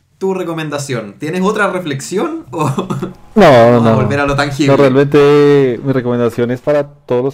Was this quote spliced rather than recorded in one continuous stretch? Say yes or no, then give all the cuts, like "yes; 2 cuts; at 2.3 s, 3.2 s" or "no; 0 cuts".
no; 0 cuts